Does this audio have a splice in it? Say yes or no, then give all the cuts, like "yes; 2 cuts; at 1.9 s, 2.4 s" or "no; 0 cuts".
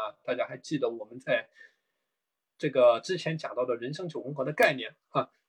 no; 0 cuts